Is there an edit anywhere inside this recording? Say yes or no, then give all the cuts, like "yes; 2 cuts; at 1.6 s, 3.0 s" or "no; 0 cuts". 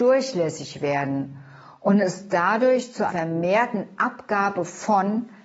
yes; 1 cut; at 3.1 s